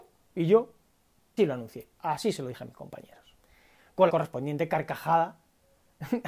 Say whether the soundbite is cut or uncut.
cut